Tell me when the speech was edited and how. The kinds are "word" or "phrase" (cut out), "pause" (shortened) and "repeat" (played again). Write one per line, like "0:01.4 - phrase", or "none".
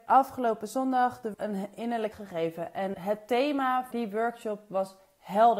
0:01.3 - word
0:02.1 - word
0:02.9 - word
0:03.9 - word